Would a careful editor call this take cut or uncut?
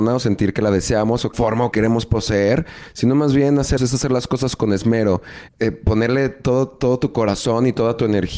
cut